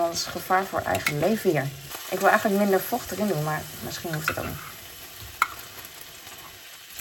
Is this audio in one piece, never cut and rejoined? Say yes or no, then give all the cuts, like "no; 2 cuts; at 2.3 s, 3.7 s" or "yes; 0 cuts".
yes; 0 cuts